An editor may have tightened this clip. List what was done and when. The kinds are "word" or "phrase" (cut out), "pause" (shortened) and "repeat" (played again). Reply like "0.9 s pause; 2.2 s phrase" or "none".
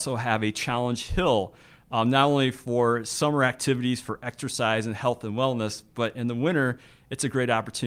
none